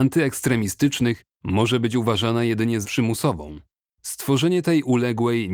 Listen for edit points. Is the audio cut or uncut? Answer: cut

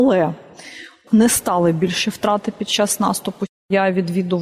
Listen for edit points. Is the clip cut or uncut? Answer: cut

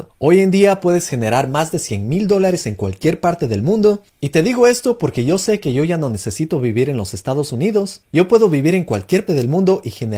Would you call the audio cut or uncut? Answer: cut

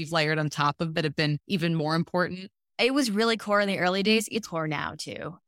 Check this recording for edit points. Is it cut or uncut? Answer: cut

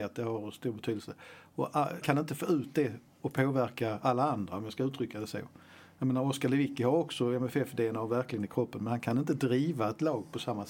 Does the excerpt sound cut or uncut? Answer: cut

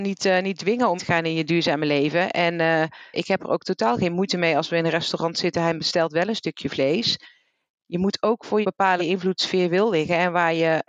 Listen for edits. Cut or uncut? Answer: cut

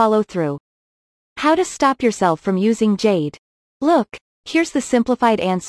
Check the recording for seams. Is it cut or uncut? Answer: uncut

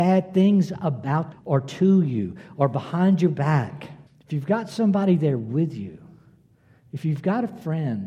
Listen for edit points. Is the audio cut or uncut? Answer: cut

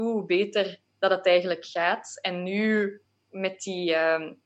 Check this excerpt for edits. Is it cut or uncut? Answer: uncut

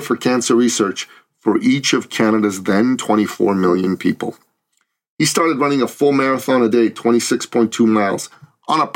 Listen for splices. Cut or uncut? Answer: uncut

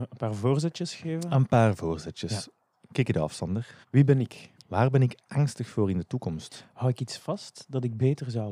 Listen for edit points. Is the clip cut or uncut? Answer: cut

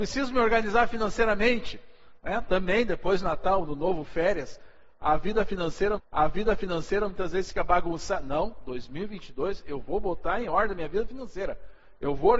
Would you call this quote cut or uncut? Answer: cut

